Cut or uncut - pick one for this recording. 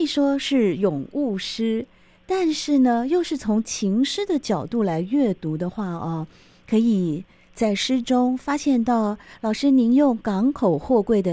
uncut